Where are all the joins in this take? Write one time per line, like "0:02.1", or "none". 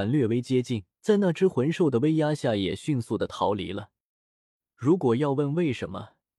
0:00.9